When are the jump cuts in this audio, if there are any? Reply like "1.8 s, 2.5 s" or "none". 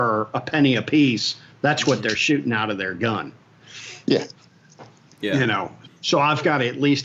none